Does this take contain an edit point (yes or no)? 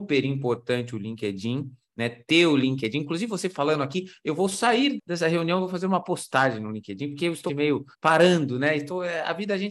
yes